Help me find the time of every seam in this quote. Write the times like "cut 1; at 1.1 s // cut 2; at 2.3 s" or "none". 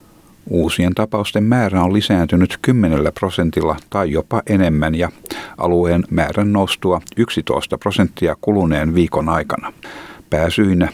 cut 1; at 6.1 s